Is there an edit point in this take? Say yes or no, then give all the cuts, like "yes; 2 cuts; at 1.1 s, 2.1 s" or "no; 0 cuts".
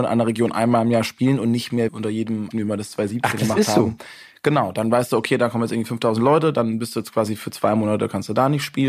yes; 2 cuts; at 1.9 s, 2.5 s